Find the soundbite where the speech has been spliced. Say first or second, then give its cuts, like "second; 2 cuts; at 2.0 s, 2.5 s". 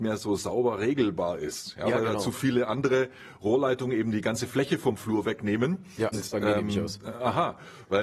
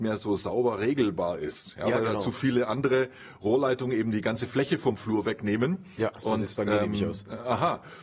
first; 1 cut; at 6.1 s